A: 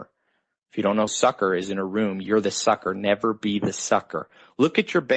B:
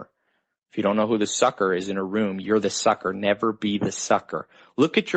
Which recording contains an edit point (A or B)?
A